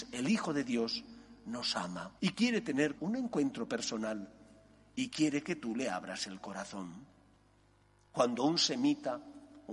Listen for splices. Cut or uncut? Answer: cut